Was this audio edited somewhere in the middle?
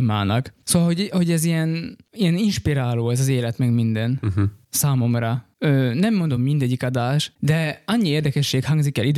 no; 0 cuts

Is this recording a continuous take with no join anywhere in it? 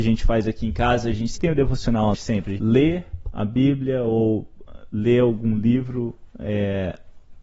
no; 3 cuts; at 1.3 s, 2.1 s, 2.6 s

